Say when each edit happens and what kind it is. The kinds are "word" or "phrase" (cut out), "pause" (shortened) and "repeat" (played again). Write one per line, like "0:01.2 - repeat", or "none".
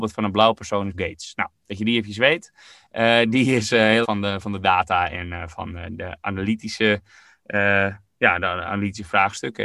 0:00.9 - word
0:04.0 - word

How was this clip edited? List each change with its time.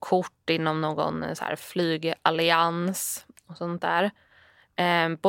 none

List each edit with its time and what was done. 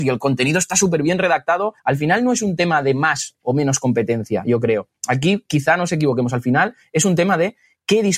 0:01.8 - pause

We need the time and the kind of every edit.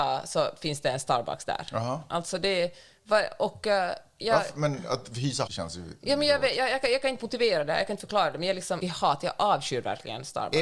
0:05.5 - word
0:08.8 - phrase

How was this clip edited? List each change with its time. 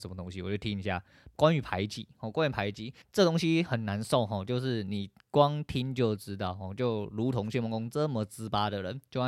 0:03.0 - pause

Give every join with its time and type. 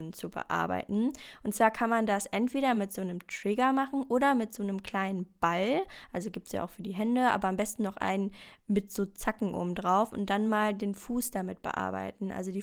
none

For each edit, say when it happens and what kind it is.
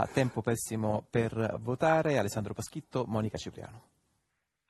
none

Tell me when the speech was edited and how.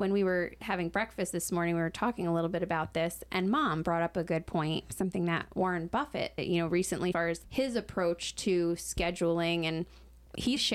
0:07.1 - phrase

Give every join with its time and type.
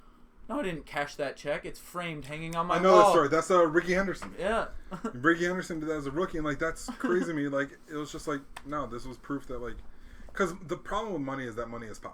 none

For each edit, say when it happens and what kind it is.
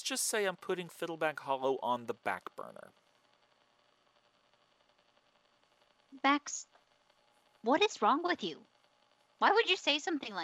none

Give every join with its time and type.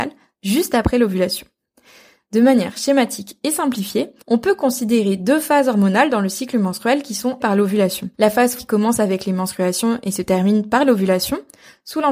0:04.2 - pause
0:07.4 - word
0:08.1 - pause
0:08.6 - word

